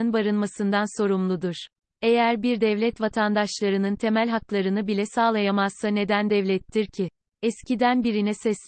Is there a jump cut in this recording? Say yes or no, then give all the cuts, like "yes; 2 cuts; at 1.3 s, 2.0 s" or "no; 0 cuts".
no; 0 cuts